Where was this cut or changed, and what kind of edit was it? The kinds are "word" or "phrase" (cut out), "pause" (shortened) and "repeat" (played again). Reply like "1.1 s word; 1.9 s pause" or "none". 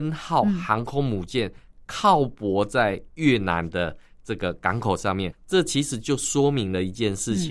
5.3 s word